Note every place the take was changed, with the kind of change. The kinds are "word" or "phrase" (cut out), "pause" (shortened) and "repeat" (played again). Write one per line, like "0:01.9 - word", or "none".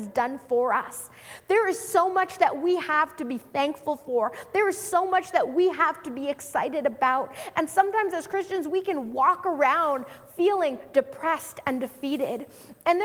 none